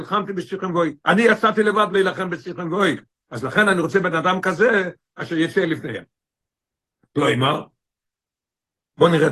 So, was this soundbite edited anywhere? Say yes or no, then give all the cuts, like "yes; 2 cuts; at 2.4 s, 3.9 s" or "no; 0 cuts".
no; 0 cuts